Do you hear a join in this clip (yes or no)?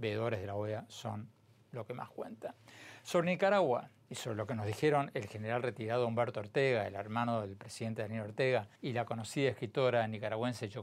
yes